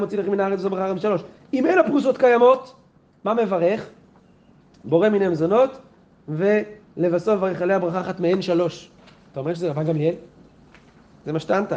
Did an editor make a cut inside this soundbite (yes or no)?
no